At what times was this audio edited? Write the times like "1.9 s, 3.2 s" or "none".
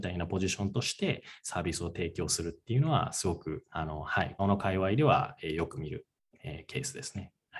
3.7 s, 4.4 s